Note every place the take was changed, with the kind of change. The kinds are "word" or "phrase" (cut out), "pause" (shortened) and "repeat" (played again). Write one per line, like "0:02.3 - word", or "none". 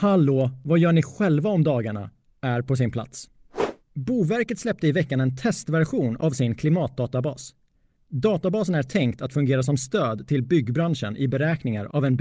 none